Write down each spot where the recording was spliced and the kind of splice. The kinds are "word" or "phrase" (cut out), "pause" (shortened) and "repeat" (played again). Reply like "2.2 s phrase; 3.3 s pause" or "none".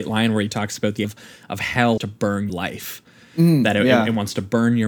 1.0 s word; 2.0 s word; 2.5 s word

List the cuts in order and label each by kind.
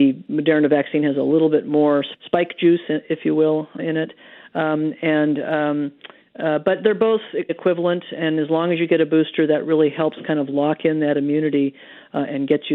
2.1 s word; 3.8 s word; 7.5 s word

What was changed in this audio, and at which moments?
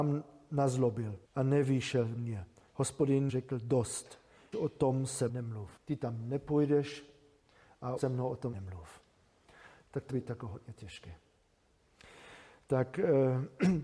1.2 s pause; 3.3 s word; 4.5 s word; 5.3 s word; 5.8 s pause; 8.0 s word; 8.5 s word; 10.1 s word

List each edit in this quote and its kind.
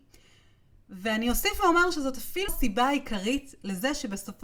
2.5 s word

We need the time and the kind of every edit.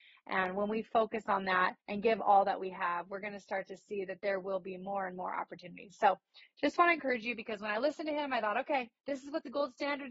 1.8 s pause; 9.0 s pause

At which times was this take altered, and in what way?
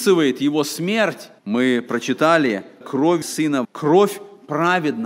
1.4 s pause; 2.8 s phrase; 3.2 s word; 3.6 s word

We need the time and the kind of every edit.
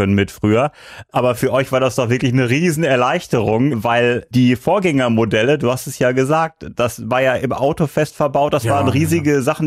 3.7 s word

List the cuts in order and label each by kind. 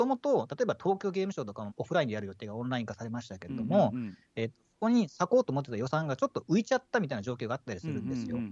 1.7 s phrase

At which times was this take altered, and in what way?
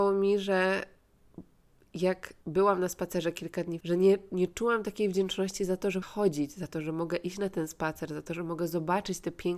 2.4 s pause; 3.8 s word; 6.0 s phrase

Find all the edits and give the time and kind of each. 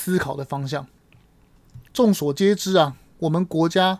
1.9 s pause

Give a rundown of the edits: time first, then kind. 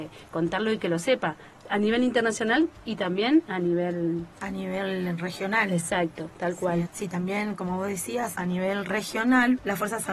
4.3 s pause; 6.9 s phrase; 8.3 s word

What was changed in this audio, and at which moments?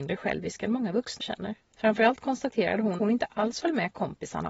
1.2 s word; 1.6 s pause; 3.0 s word

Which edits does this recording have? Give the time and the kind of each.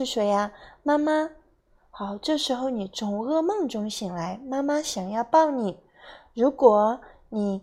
none

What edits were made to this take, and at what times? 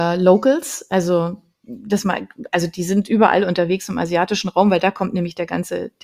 none

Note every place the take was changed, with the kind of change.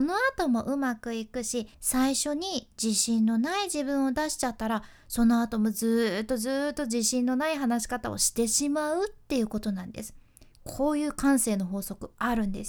1.7 s pause

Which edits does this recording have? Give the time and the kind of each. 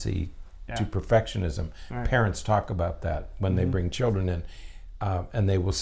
none

